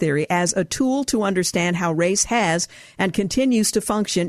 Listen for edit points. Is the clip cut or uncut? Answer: uncut